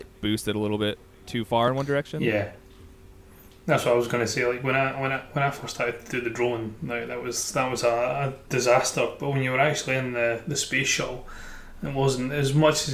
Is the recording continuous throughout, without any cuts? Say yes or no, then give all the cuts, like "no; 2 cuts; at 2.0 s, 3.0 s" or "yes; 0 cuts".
yes; 0 cuts